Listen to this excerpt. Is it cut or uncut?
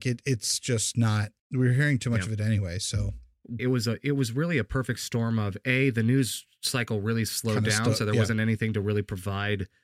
cut